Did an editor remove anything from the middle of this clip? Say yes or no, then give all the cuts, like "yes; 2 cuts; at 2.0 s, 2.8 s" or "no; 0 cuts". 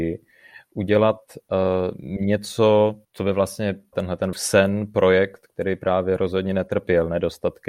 yes; 3 cuts; at 3.0 s, 3.9 s, 4.3 s